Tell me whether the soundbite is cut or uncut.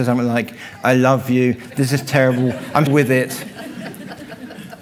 cut